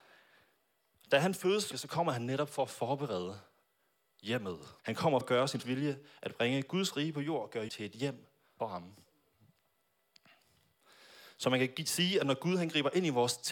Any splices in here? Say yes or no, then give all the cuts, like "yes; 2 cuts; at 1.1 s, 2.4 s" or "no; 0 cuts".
yes; 6 cuts; at 1.7 s, 4.8 s, 5.2 s, 5.6 s, 7.7 s, 8.6 s